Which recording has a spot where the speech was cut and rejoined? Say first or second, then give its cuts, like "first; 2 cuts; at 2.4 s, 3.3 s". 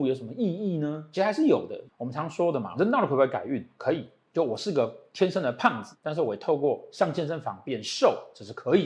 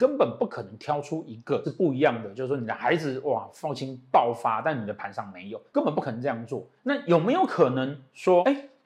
second; 1 cut; at 6.8 s